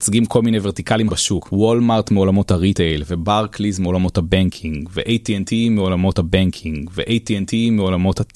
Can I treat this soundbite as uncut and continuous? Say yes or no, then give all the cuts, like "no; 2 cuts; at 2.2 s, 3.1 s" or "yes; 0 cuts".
no; 2 cuts; at 1.1 s, 6.1 s